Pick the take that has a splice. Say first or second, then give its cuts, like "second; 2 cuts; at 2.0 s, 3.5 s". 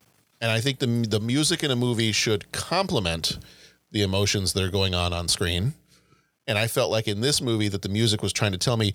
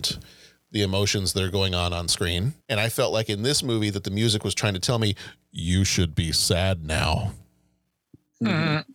second; 1 cut; at 2.6 s